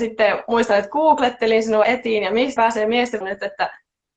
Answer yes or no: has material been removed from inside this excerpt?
yes